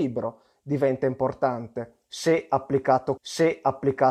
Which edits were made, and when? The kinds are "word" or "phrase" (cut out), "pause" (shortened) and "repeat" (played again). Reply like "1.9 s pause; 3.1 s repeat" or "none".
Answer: 3.2 s repeat